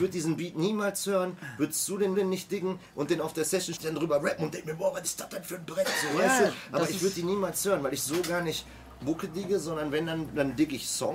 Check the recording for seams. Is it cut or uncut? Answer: cut